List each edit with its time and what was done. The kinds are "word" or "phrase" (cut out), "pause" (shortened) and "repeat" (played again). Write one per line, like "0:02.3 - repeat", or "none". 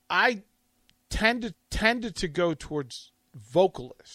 0:01.5 - repeat